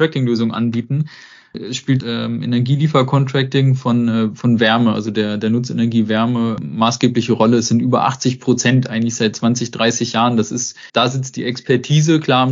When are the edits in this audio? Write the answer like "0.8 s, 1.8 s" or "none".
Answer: 2.0 s, 10.9 s